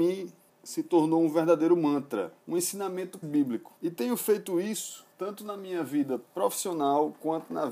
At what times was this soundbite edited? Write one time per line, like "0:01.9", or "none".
0:02.4
0:03.2
0:03.8
0:05.1